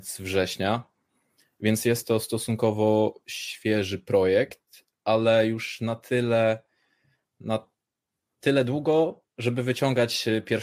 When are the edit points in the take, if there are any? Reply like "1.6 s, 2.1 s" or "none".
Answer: none